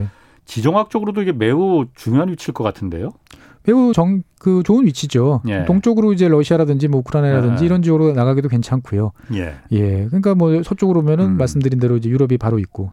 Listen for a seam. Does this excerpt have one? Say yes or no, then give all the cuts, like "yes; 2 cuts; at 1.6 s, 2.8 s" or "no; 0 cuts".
yes; 1 cut; at 3.9 s